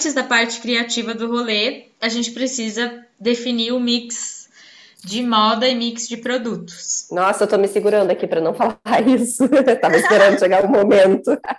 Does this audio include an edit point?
no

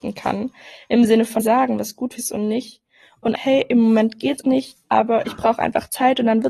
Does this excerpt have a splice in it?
yes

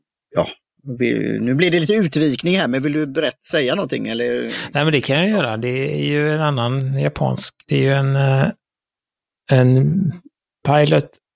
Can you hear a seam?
no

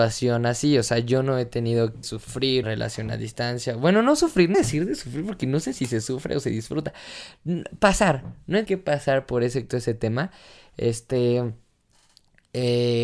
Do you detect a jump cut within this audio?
yes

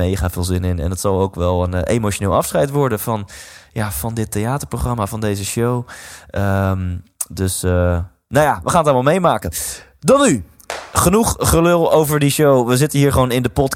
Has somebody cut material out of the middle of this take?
no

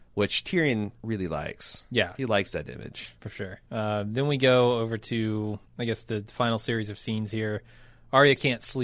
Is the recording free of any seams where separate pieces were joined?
no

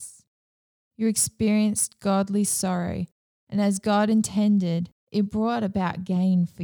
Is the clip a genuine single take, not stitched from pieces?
yes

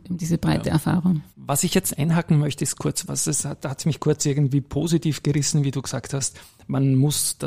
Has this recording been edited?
yes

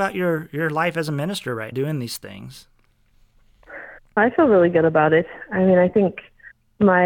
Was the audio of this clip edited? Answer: yes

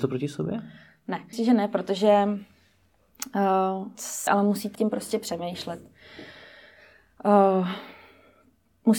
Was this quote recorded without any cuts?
no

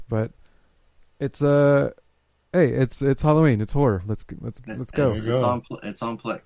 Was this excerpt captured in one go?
yes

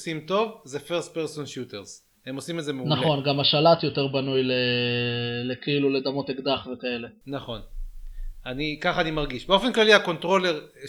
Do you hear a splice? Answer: yes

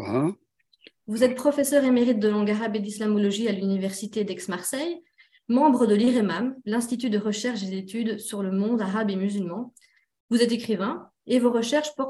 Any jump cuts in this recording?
no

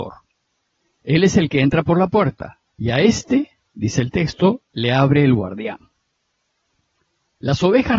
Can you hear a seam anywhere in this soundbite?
yes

